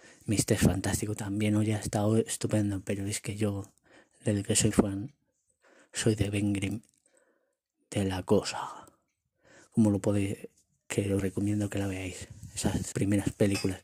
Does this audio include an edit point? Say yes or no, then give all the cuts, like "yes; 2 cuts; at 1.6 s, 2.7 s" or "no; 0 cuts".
yes; 3 cuts; at 4.7 s, 11.2 s, 12.9 s